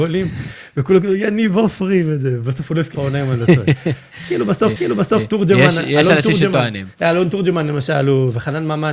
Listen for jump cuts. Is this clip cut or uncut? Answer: cut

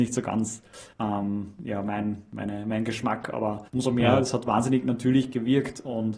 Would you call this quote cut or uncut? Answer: cut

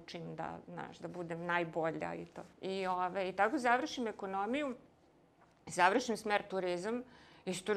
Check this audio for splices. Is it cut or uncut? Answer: cut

